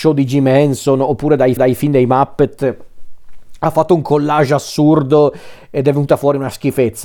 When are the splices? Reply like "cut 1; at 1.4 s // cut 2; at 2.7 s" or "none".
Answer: cut 1; at 1.6 s